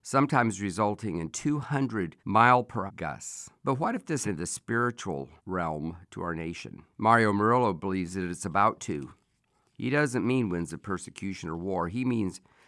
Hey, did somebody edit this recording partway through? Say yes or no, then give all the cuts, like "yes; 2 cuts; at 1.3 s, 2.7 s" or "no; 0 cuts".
yes; 6 cuts; at 2.2 s, 2.9 s, 3.6 s, 4.2 s, 5.4 s, 6.9 s